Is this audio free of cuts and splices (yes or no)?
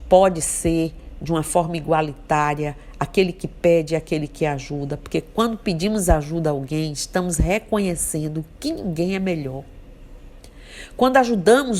yes